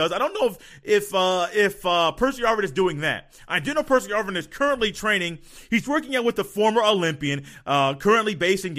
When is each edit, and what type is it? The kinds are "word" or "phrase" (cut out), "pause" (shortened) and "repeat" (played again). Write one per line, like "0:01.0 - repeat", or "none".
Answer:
none